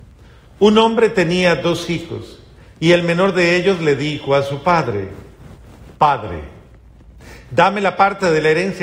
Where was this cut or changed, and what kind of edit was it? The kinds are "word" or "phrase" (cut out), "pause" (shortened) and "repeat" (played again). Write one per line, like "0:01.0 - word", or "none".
none